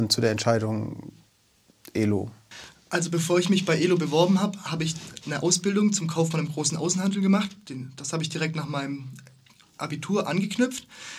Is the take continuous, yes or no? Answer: yes